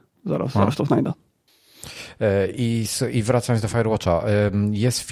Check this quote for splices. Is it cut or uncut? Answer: uncut